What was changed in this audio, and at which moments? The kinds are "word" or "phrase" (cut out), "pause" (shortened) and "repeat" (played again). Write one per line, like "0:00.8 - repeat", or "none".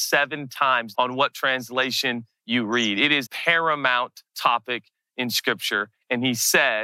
0:00.9 - word
0:03.3 - word
0:04.3 - pause